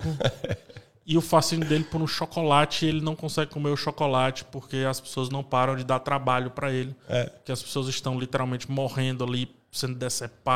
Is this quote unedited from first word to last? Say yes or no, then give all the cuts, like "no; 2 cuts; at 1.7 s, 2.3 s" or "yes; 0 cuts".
yes; 0 cuts